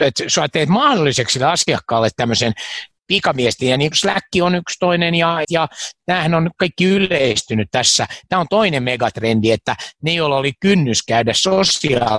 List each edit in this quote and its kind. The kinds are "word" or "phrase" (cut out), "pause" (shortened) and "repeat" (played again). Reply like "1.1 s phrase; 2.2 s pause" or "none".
3.9 s word; 5.4 s word